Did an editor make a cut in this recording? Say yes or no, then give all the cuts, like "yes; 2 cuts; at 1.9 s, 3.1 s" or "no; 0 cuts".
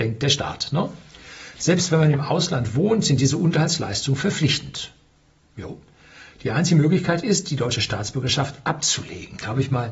no; 0 cuts